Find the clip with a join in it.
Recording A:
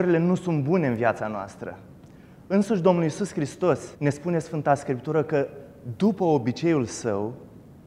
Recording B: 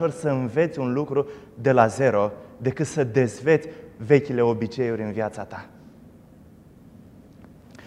A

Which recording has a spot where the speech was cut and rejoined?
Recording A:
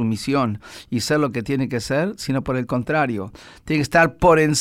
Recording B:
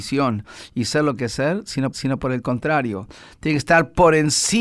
B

